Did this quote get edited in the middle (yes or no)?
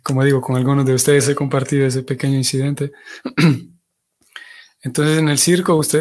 no